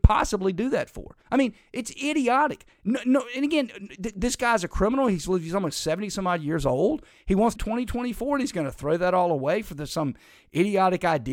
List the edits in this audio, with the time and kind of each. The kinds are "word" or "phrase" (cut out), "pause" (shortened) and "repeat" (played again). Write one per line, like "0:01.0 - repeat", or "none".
0:01.2 - pause
0:07.6 - phrase